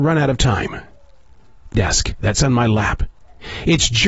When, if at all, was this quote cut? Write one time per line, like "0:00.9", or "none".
0:01.7
0:02.3